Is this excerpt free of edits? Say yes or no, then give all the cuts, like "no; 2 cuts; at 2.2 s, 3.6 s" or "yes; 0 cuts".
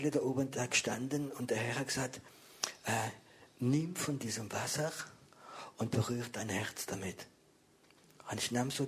yes; 0 cuts